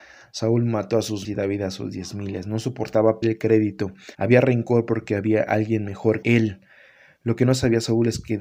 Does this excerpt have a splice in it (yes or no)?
yes